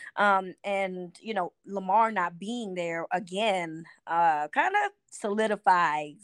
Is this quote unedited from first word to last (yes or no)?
yes